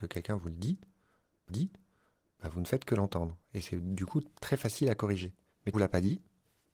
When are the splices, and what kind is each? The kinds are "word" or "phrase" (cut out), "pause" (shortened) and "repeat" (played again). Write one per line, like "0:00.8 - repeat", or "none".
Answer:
0:01.5 - repeat
0:05.7 - phrase